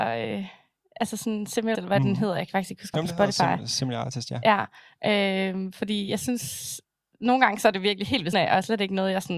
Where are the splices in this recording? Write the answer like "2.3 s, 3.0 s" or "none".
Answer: 1.7 s, 2.9 s, 8.3 s